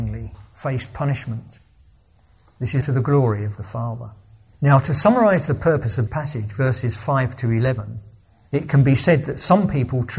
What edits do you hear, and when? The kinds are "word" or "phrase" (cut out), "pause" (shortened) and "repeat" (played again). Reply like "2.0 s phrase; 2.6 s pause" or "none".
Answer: 2.8 s word; 3.6 s word; 6.1 s word